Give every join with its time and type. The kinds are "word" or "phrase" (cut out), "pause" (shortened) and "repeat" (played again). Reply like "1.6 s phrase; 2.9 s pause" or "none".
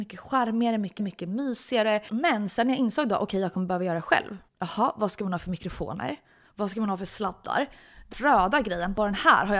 1.0 s repeat; 4.5 s pause; 8.1 s word